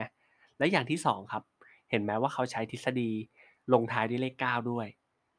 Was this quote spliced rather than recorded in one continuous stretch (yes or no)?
no